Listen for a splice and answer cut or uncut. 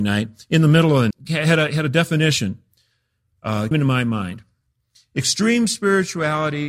cut